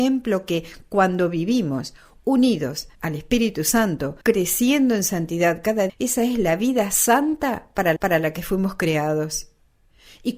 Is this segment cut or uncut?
cut